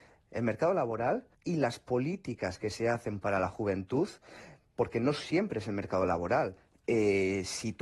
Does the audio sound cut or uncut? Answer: cut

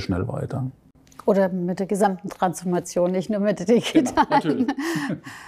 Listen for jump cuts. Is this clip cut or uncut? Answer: uncut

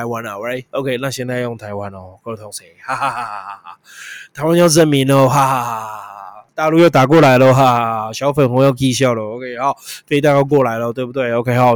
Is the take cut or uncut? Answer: cut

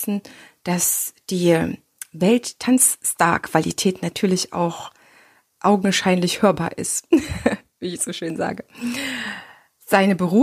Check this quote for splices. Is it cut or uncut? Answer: uncut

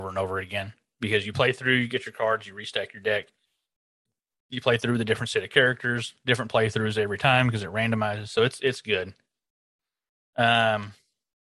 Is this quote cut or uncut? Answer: uncut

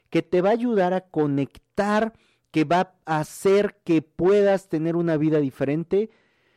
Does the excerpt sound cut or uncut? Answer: uncut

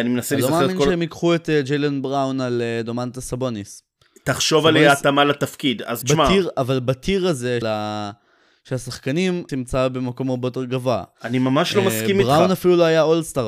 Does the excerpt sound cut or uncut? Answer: cut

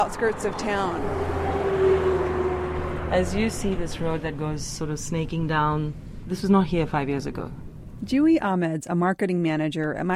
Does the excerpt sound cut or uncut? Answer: uncut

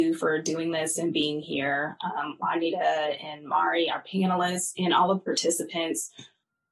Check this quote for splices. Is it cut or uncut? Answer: uncut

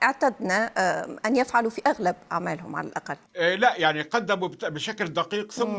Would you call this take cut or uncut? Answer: cut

